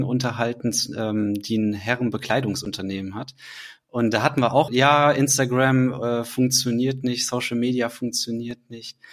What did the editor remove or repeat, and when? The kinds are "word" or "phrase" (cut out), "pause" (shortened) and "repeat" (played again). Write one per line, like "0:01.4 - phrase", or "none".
0:04.7 - word